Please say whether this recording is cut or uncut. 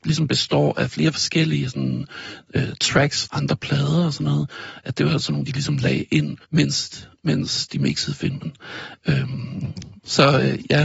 cut